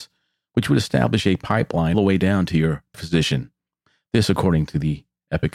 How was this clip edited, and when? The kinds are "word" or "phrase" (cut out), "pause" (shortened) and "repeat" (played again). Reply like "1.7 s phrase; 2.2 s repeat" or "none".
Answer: 1.9 s word; 2.9 s phrase